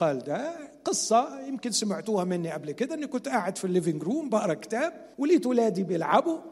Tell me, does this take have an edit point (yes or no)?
yes